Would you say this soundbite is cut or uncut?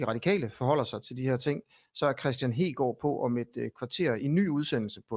uncut